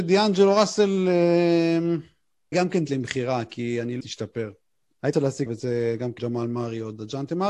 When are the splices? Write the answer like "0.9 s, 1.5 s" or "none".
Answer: 2.5 s, 2.9 s, 4.0 s, 5.1 s, 5.5 s, 6.2 s